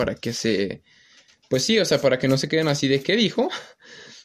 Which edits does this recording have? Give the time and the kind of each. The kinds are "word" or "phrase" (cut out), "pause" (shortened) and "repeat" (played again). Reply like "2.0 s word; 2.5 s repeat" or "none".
none